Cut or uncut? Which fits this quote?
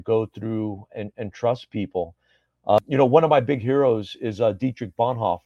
uncut